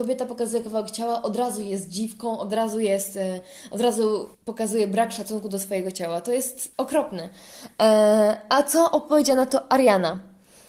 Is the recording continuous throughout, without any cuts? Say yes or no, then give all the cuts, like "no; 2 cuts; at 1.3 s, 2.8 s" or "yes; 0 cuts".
no; 2 cuts; at 4.3 s, 6.7 s